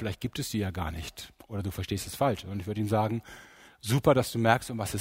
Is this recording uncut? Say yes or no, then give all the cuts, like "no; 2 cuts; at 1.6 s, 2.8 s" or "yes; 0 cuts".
yes; 0 cuts